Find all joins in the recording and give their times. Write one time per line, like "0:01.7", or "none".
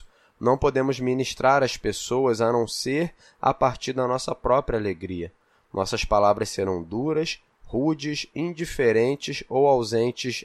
none